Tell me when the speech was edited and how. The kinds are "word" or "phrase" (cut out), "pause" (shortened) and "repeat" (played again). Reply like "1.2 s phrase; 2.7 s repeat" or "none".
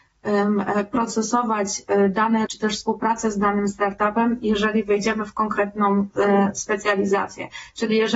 2.5 s word